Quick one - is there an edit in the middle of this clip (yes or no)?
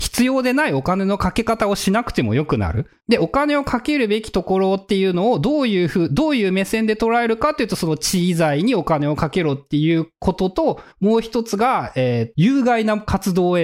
yes